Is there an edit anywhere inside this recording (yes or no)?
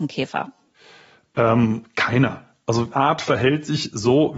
yes